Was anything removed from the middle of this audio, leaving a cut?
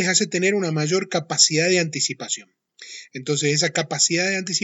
no; 0 cuts

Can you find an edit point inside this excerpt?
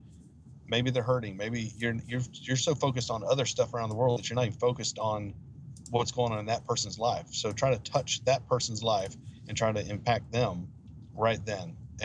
no; 0 cuts

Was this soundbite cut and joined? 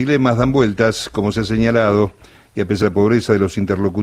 yes; 2 cuts; at 1.3 s, 2.8 s

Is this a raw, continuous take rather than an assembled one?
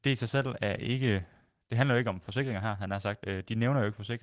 yes; 0 cuts

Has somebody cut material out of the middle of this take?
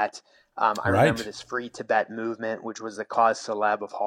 no; 0 cuts

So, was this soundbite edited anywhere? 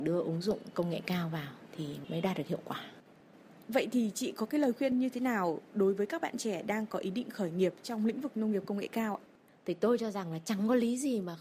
no; 0 cuts

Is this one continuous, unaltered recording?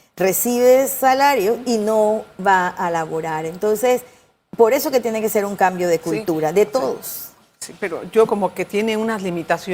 no; 1 cut; at 8.3 s

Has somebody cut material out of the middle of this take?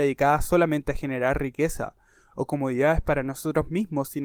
no; 0 cuts

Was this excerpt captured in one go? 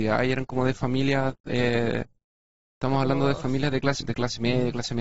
no; 1 cut; at 4.0 s

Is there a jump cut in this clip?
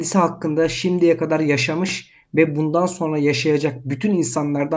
no; 0 cuts

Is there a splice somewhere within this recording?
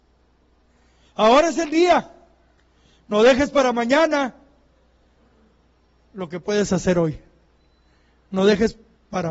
no; 0 cuts

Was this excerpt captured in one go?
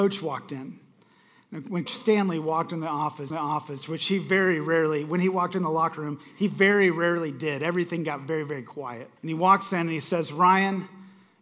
no; 3 cuts; at 1.9 s, 3.3 s, 9.2 s

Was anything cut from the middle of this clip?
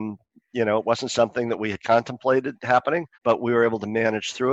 yes; 1 cut; at 3.1 s

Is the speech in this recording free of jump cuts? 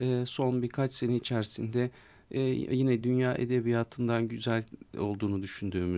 yes; 0 cuts

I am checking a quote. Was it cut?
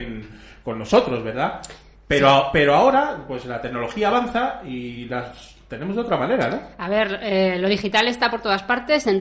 no; 0 cuts

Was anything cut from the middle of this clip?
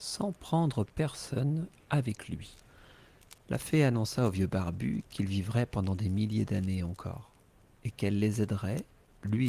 no; 0 cuts

